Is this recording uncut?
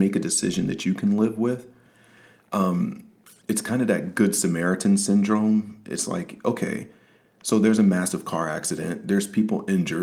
yes; 0 cuts

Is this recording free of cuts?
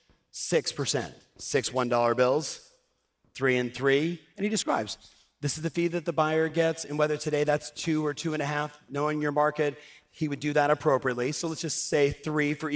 yes; 0 cuts

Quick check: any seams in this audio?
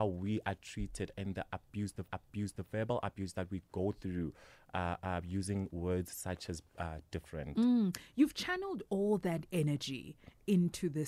yes; 1 cut; at 2.1 s

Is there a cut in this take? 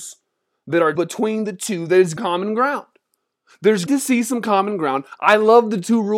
yes; 3 cuts; at 0.9 s, 2.2 s, 3.9 s

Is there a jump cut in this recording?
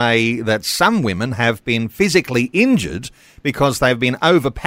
no; 0 cuts

